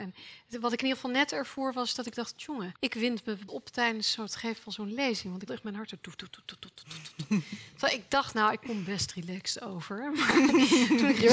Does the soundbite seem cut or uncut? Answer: cut